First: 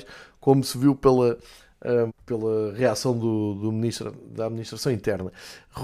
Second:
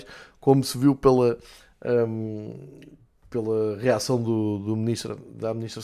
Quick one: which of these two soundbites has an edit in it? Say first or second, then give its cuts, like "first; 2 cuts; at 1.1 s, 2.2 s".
first; 1 cut; at 2.1 s